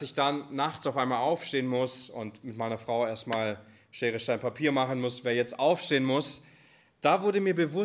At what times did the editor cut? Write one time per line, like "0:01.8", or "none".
none